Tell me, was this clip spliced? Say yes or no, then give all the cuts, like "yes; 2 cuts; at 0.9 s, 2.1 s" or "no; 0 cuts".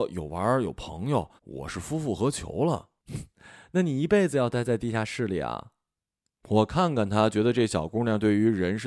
yes; 3 cuts; at 1.4 s, 3.0 s, 5.9 s